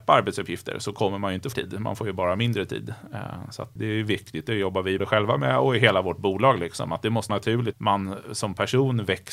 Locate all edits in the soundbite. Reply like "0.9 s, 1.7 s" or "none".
1.5 s, 3.8 s, 5.0 s, 7.3 s, 7.7 s